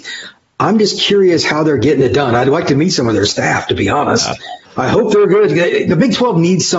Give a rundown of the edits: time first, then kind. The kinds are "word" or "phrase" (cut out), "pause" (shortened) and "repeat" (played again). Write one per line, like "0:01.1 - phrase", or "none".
0:04.7 - pause